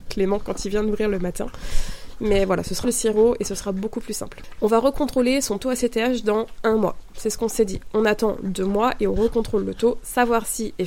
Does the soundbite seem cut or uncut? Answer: cut